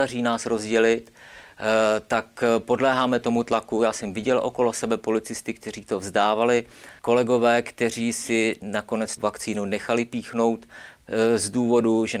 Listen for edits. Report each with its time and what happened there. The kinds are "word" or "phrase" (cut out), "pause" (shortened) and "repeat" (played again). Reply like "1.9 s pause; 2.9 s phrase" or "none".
7.0 s pause; 9.2 s word